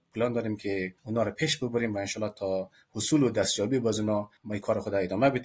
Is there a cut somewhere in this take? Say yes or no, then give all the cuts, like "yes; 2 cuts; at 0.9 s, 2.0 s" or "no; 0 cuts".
no; 0 cuts